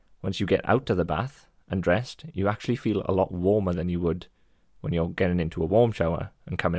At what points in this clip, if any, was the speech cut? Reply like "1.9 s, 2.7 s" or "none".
none